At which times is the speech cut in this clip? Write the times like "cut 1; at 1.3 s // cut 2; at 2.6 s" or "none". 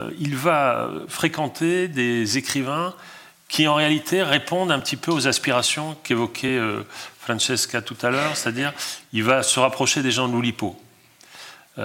none

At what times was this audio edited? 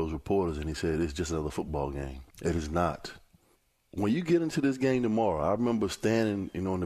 cut 1; at 2.3 s // cut 2; at 3.5 s

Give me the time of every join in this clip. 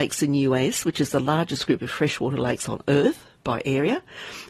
none

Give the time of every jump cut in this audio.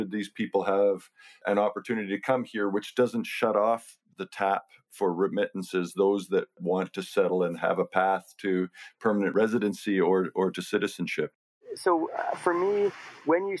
none

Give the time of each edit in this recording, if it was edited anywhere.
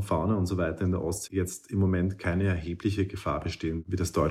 cut 1; at 1.3 s

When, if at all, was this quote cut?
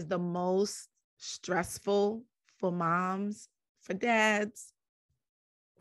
none

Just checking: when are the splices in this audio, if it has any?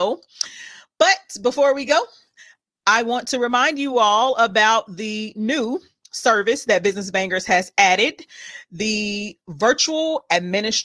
none

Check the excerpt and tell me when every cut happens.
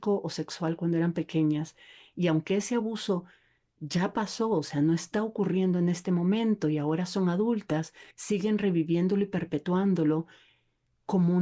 cut 1; at 8.1 s

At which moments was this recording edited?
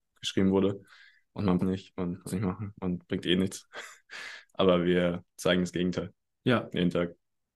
cut 1; at 1.6 s // cut 2; at 2.3 s

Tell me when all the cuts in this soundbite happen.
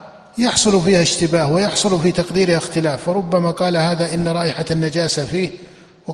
none

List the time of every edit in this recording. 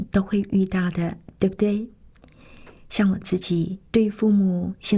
cut 1; at 3.9 s

